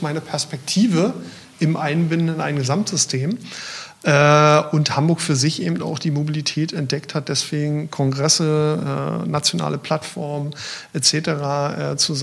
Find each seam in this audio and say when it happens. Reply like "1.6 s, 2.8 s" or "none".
none